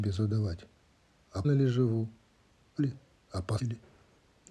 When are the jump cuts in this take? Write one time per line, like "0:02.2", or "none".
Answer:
0:01.4
0:02.8
0:03.6

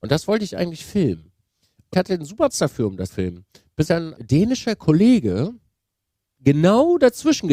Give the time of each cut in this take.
0:01.9
0:02.5
0:03.1
0:03.9
0:04.2

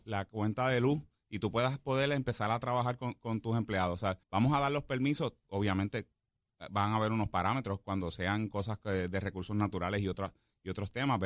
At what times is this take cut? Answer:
0:04.2

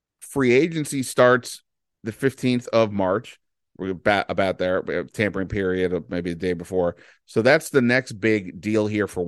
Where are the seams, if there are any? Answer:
none

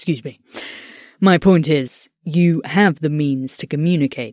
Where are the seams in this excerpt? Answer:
none

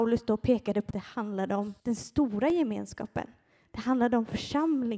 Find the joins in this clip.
0:00.9
0:01.8

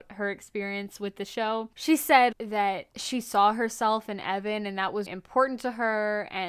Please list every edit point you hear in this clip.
0:02.3
0:05.1

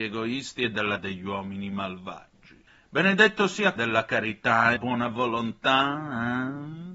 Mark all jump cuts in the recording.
0:01.0
0:02.7
0:03.8
0:04.8

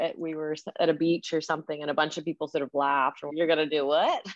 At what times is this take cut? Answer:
0:03.3

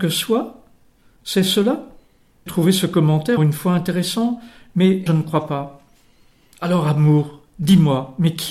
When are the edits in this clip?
0:02.5
0:03.4
0:05.1

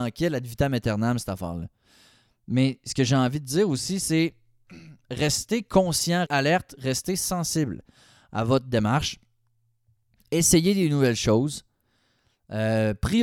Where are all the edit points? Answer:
0:06.3

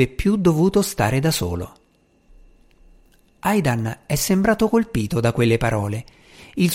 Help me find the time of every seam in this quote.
none

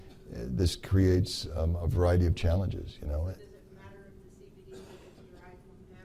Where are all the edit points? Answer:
none

